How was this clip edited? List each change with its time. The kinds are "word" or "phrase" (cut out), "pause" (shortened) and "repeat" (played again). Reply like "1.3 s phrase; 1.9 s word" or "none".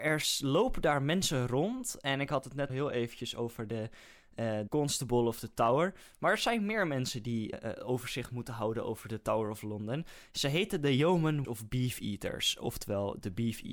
2.7 s word; 4.7 s word; 7.5 s word; 11.4 s word